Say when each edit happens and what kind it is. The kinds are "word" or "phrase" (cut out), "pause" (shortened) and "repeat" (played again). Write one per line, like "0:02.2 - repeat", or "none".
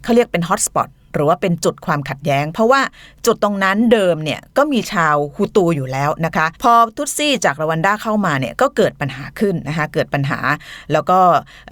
0:06.6 - pause